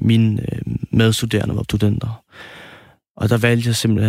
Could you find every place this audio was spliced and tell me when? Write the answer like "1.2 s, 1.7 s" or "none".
1.6 s